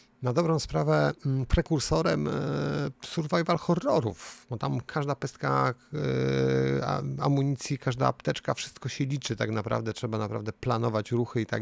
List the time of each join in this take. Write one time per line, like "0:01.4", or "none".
0:03.0